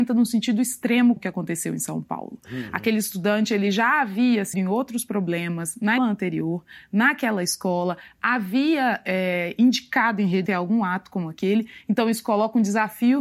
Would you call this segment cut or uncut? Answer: cut